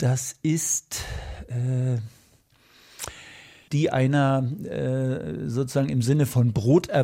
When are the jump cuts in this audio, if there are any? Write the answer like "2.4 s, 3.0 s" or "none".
3.7 s